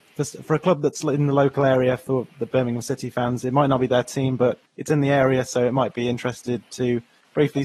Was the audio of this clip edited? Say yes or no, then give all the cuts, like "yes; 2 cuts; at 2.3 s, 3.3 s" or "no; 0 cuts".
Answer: no; 0 cuts